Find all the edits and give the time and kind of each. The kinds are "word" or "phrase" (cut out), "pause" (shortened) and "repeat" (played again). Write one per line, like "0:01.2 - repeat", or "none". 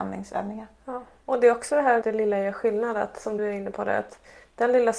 0:02.0 - word
0:03.4 - word